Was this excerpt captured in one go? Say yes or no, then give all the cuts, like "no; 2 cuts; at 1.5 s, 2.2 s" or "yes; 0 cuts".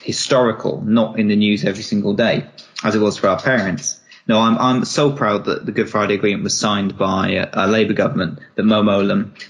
yes; 0 cuts